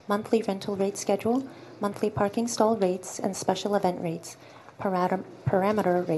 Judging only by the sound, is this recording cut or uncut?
uncut